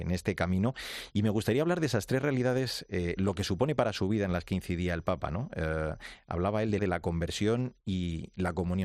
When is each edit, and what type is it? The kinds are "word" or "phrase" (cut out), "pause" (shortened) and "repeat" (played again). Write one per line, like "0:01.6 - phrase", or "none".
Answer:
0:06.8 - phrase